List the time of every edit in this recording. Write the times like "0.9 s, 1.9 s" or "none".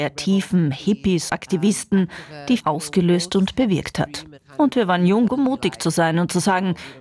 1.3 s, 2.6 s, 5.3 s